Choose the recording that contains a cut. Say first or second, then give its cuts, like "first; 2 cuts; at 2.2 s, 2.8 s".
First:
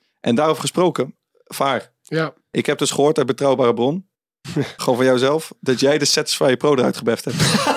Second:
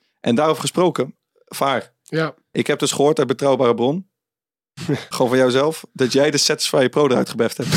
first; 1 cut; at 4.1 s